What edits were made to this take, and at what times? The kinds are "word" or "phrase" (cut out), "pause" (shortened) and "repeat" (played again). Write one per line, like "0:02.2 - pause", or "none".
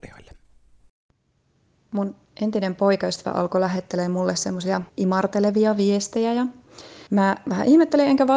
0:04.9 - pause
0:07.1 - pause

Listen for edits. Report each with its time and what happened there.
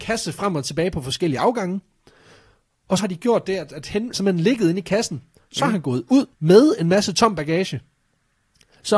0:03.0 - word
0:04.1 - phrase
0:06.3 - pause

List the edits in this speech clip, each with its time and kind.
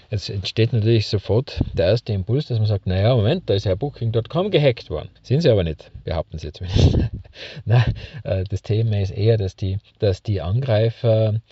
0:05.2 - pause
0:09.9 - pause

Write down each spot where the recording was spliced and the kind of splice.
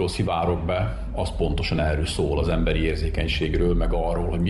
none

